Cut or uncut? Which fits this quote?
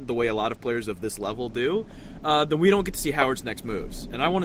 uncut